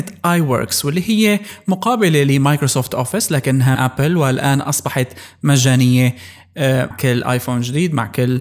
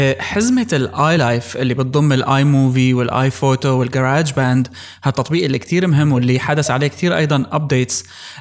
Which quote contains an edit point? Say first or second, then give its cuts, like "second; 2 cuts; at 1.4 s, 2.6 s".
first; 2 cuts; at 3.8 s, 6.9 s